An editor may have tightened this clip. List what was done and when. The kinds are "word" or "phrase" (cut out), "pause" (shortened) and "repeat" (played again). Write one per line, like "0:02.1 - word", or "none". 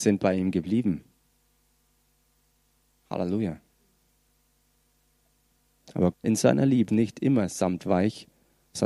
0:06.1 - word
0:06.9 - word